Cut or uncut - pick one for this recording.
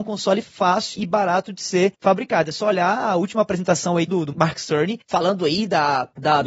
cut